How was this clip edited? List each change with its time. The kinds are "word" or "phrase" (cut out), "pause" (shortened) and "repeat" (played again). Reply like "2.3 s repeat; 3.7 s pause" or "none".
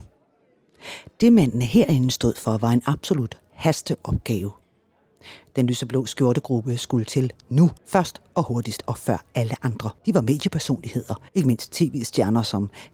7.8 s pause; 10.0 s pause; 11.3 s pause